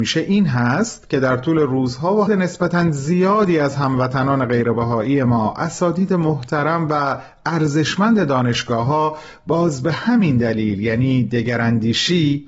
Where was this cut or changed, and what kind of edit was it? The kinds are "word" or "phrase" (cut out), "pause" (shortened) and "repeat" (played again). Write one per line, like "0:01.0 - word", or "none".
0:02.3 - phrase

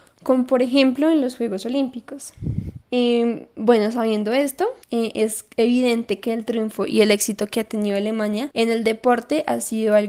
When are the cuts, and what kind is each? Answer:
0:02.8 - pause
0:04.8 - pause

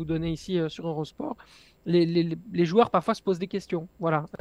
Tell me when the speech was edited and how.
none

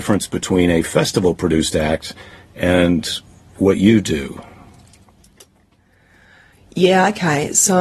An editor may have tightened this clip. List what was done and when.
none

